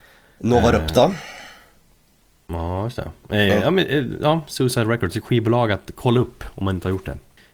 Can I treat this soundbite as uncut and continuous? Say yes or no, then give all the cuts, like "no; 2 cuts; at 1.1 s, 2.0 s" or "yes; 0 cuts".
yes; 0 cuts